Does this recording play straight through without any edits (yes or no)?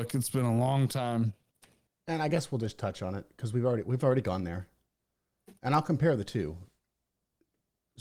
yes